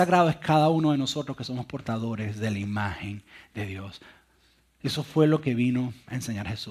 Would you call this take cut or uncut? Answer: uncut